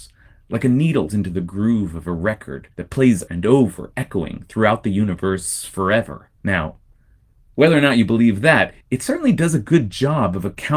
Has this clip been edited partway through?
yes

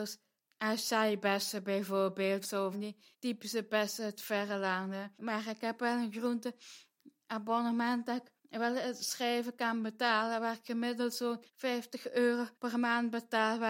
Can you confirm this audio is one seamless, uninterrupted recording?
no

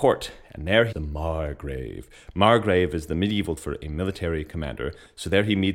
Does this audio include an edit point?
yes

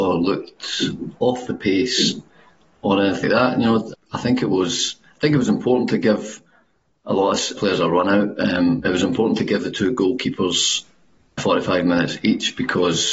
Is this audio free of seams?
no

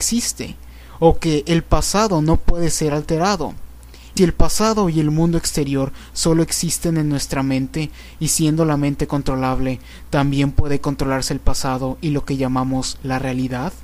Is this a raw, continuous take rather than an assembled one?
no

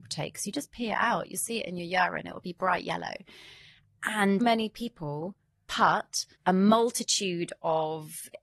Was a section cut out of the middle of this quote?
yes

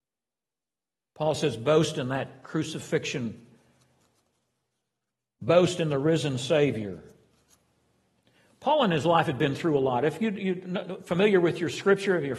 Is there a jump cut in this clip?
no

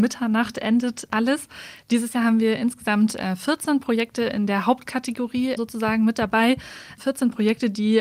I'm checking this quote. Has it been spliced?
yes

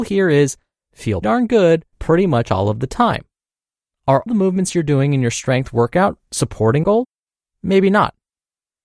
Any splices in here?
yes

